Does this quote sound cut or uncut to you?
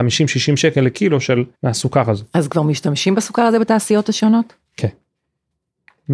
cut